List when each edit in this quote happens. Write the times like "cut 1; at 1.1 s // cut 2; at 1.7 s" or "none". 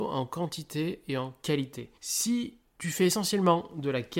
cut 1; at 2.0 s